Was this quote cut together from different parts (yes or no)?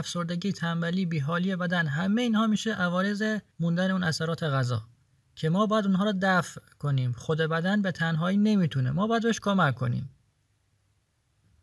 yes